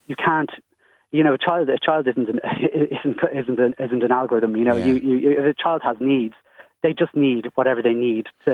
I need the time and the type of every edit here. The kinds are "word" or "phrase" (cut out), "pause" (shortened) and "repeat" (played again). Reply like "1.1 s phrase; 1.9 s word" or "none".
none

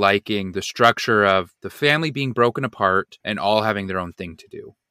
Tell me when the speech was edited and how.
1.6 s pause; 3.2 s pause

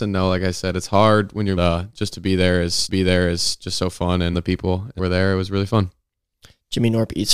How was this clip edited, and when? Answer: 1.6 s phrase; 2.9 s repeat; 4.3 s phrase; 5.0 s phrase

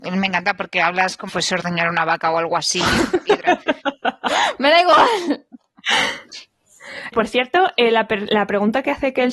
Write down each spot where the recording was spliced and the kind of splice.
1.3 s word; 7.1 s word

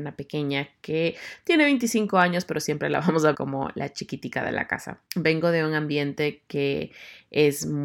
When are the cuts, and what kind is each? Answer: 3.3 s word; 5.1 s pause

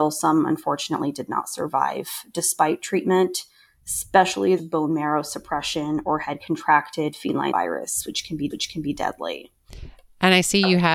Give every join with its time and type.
4.6 s phrase; 7.5 s word; 8.5 s repeat

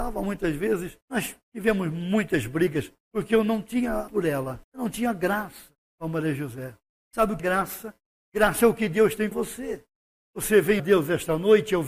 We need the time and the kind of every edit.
1.0 s pause; 3.0 s pause; 4.1 s word; 4.6 s pause; 5.8 s pause; 6.9 s pause; 7.4 s word; 9.3 s word; 10.8 s word

